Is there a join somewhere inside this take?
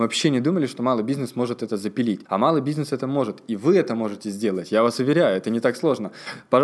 yes; 1 cut; at 2.3 s

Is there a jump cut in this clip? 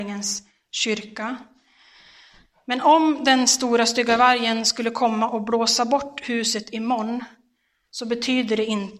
no; 0 cuts

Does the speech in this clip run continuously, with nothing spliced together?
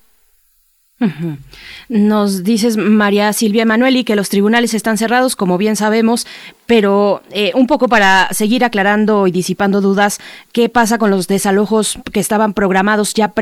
yes; 0 cuts

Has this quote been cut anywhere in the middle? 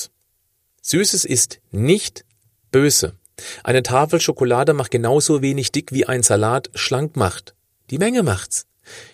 no; 0 cuts

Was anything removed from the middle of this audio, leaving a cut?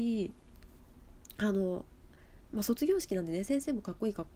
no; 0 cuts

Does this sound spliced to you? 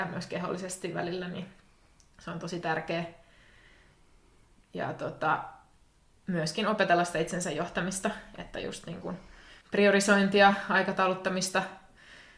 yes; 1 cut; at 9.6 s

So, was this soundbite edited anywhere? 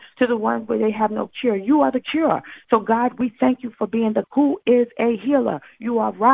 yes; 1 cut; at 4.2 s

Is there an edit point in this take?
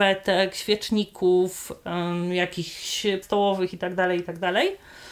yes; 1 cut; at 3.2 s

